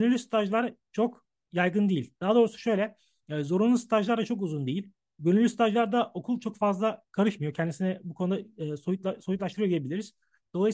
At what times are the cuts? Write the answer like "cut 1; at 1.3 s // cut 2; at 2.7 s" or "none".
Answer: none